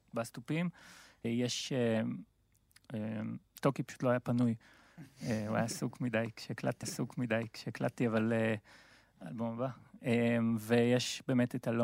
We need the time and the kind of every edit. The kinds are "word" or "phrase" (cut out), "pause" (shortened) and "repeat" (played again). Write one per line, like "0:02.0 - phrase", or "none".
0:01.2 - word
0:06.8 - repeat